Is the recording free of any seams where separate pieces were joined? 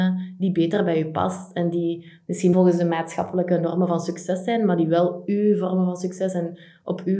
no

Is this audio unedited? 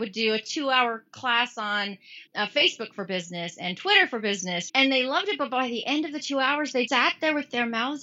no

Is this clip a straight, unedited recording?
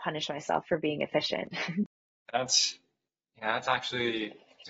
yes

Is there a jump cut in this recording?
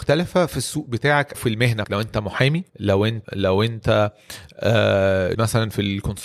yes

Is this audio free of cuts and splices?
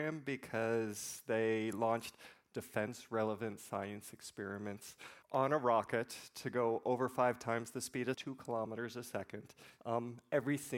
no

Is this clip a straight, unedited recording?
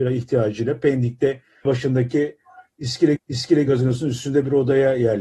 no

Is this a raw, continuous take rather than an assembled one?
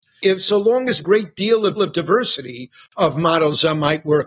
no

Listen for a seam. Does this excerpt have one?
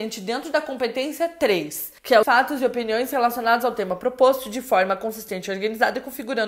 yes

